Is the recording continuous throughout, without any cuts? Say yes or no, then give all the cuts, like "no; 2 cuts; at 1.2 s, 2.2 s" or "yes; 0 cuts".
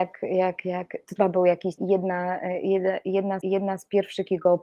no; 3 cuts; at 1.2 s, 1.8 s, 3.4 s